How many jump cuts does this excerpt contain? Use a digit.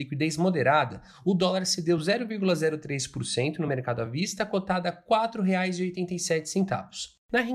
0